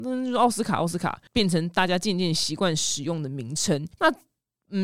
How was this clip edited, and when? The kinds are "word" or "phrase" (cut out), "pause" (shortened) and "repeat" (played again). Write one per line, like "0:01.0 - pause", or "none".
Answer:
0:01.3 - pause
0:03.9 - pause